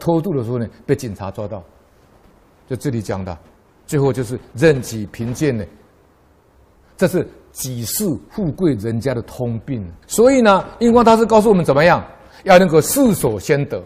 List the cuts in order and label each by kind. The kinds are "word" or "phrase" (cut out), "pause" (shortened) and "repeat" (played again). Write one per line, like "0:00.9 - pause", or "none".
0:10.0 - pause